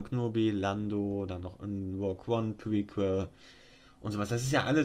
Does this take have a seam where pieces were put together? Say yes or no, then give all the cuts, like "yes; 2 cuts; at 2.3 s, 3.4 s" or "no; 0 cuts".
no; 0 cuts